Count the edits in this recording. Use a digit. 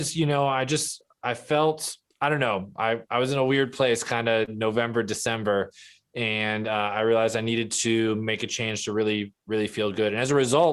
1